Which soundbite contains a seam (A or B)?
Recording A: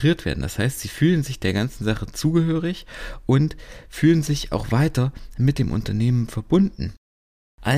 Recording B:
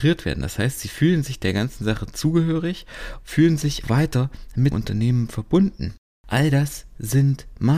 B